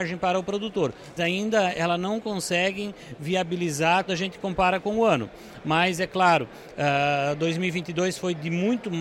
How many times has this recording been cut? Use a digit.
2